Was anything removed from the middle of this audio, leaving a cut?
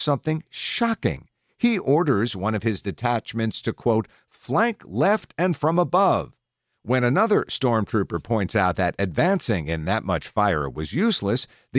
no; 0 cuts

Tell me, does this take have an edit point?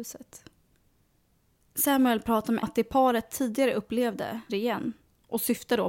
yes; 2 cuts; at 2.6 s, 4.5 s

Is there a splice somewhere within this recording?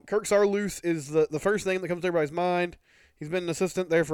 no; 0 cuts

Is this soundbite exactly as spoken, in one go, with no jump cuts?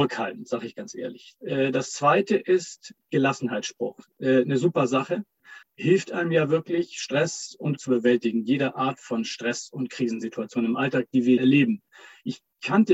no; 3 cuts; at 5.6 s, 7.8 s, 11.4 s

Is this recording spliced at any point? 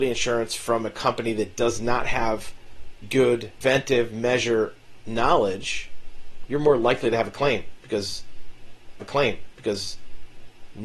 yes; 2 cuts; at 3.0 s, 9.0 s

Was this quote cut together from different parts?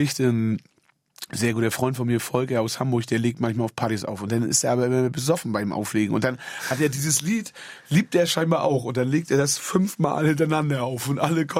no; 0 cuts

